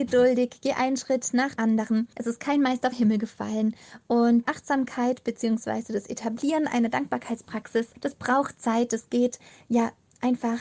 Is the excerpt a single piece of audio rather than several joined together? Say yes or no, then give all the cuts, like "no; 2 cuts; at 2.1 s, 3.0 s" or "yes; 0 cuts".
no; 5 cuts; at 1.6 s, 2.1 s, 2.9 s, 4.5 s, 7.9 s